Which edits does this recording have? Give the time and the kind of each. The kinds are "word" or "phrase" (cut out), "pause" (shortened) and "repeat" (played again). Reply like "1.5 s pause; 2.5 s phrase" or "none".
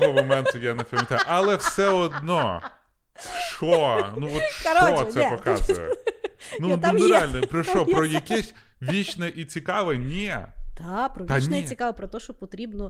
none